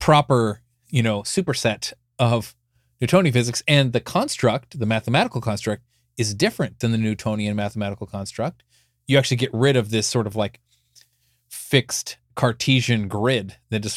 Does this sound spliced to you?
no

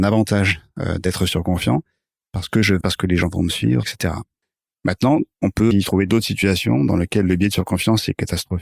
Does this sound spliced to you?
yes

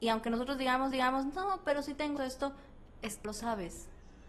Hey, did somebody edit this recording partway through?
yes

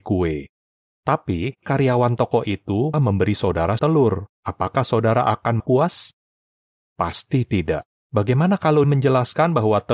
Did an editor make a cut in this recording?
yes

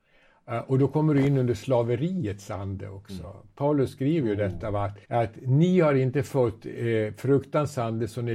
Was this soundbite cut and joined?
yes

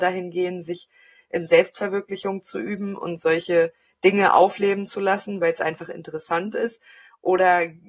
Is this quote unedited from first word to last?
yes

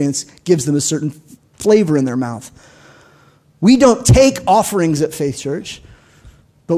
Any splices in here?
no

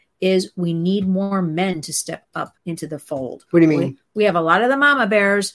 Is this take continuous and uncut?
no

